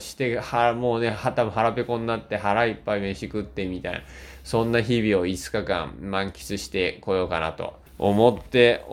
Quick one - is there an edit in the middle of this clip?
yes; 1 cut; at 7.9 s

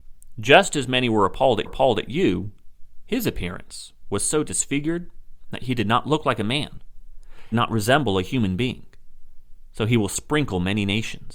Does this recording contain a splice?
yes; 2 cuts; at 1.7 s, 7.5 s

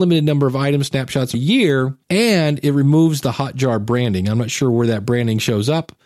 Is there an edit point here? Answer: yes; 2 cuts; at 1.3 s, 2.0 s

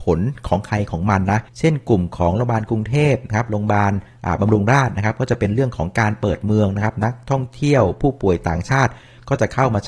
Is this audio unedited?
no; 1 cut; at 1.5 s

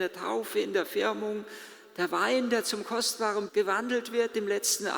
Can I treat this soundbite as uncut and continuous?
no; 1 cut; at 3.5 s

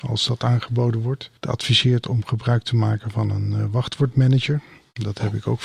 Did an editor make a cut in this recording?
yes; 1 cut; at 1.4 s

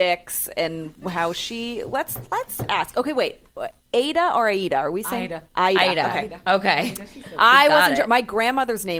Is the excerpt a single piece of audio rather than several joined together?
yes; 0 cuts

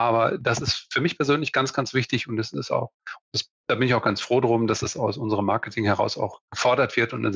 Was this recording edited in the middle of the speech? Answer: yes; 1 cut; at 3.6 s

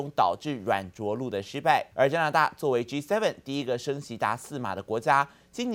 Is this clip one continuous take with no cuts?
no; 1 cut; at 1.9 s

